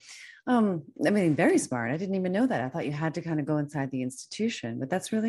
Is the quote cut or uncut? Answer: uncut